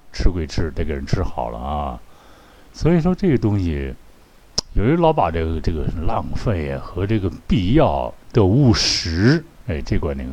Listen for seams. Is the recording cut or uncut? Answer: cut